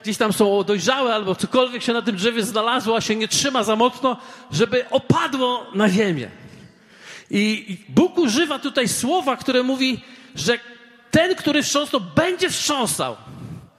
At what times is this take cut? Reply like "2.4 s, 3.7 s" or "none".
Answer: none